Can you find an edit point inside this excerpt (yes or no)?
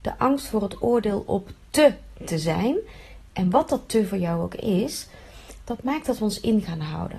no